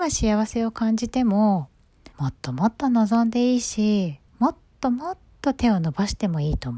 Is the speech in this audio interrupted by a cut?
yes; 2 cuts; at 2.1 s, 4.3 s

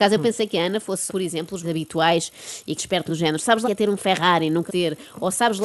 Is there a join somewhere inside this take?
yes; 6 cuts; at 1.1 s, 1.6 s, 2.8 s, 3.1 s, 3.6 s, 4.7 s

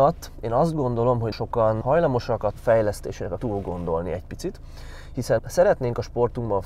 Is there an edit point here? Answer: yes; 5 cuts; at 1.3 s, 1.8 s, 2.6 s, 3.4 s, 5.4 s

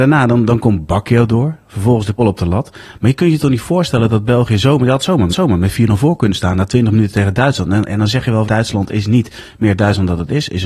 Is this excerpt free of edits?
no; 3 cuts; at 2.2 s, 5.3 s, 8.4 s

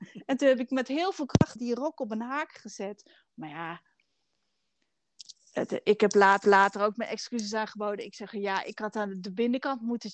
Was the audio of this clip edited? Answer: yes; 2 cuts; at 1.6 s, 6.4 s

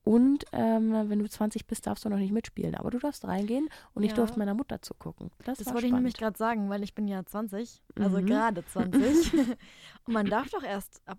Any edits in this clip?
no; 0 cuts

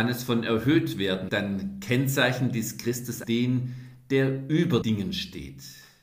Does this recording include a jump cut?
yes; 3 cuts; at 1.3 s, 3.2 s, 4.8 s

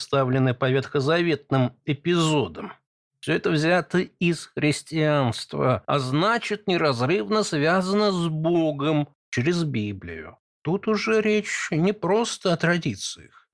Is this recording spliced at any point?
no; 0 cuts

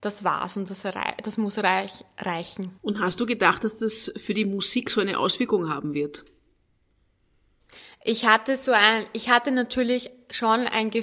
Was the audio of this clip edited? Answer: yes; 1 cut; at 2.8 s

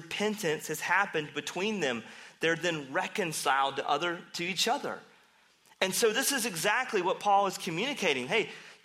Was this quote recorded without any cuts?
yes; 0 cuts

